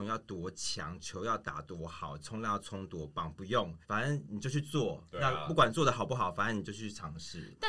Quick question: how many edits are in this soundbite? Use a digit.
1